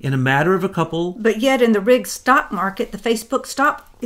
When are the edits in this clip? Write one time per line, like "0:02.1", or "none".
none